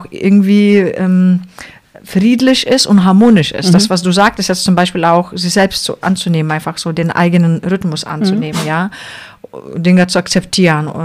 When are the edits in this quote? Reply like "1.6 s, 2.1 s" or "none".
none